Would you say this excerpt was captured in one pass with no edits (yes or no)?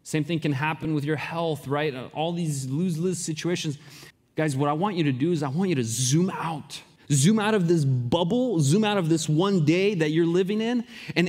no